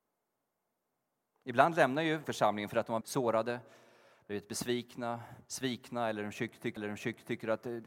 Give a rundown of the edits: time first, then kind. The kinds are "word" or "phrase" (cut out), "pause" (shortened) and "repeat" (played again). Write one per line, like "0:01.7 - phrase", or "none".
0:02.2 - word
0:03.0 - word
0:05.5 - pause
0:06.8 - repeat